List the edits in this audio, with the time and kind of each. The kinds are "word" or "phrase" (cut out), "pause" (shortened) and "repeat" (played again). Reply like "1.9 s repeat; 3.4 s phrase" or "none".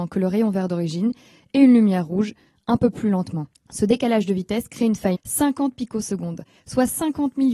3.5 s pause; 5.1 s word